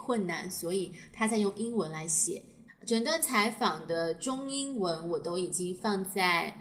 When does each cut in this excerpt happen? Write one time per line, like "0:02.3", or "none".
0:02.7